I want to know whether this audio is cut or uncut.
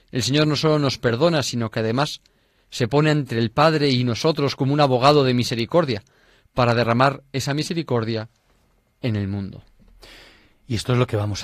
uncut